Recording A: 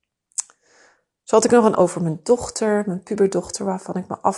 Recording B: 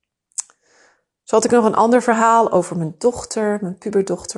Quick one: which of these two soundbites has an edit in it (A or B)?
A